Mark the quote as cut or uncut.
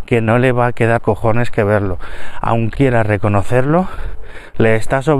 cut